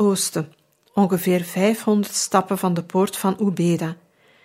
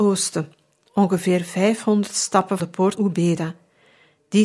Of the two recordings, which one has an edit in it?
second; 2 cuts; at 2.6 s, 2.9 s

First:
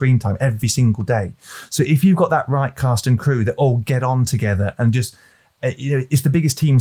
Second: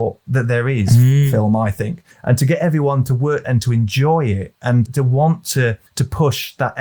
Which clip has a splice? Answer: second; 4 cuts; at 2.1 s, 3.4 s, 4.9 s, 5.9 s

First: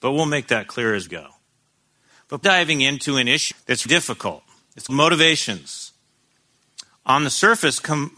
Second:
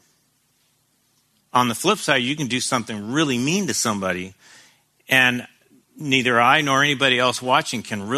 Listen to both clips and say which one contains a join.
first; 5 cuts; at 1.1 s, 2.4 s, 3.5 s, 3.9 s, 4.9 s

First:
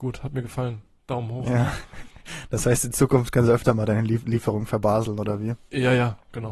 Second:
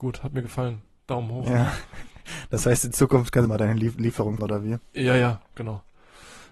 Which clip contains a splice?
second; 2 cuts; at 3.5 s, 4.4 s

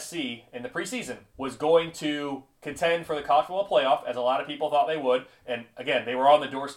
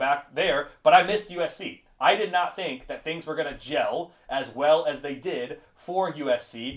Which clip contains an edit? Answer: first; 1 cut; at 1.3 s

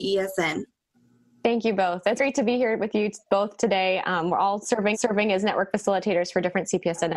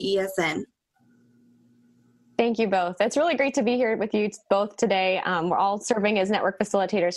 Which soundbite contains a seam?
first; 3 cuts; at 0.9 s, 2.2 s, 4.9 s

